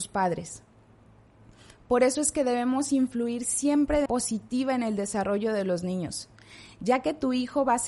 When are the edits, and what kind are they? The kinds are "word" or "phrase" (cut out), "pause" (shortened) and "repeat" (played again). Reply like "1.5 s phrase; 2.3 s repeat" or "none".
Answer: 4.1 s word